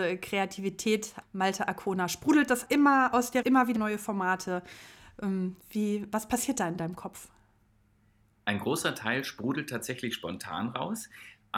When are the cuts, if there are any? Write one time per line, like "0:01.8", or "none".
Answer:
0:01.2
0:02.7
0:03.4
0:03.8